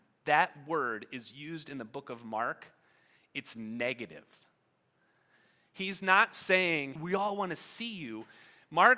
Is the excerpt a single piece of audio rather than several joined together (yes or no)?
no